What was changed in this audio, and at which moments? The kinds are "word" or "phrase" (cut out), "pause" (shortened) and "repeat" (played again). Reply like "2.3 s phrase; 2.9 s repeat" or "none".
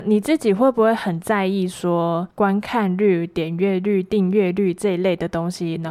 2.3 s pause